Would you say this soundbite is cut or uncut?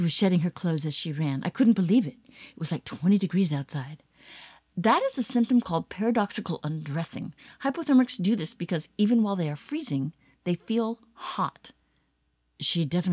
uncut